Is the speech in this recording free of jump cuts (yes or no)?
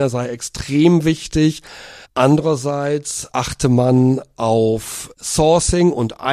no